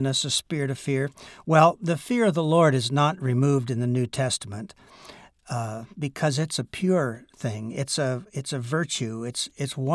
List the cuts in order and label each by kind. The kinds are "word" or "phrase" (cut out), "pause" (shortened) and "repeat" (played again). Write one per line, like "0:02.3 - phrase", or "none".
none